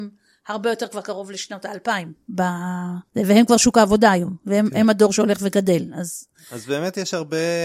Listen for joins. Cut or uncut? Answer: cut